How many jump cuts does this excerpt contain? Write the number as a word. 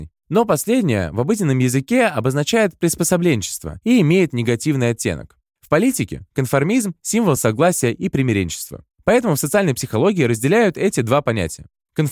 zero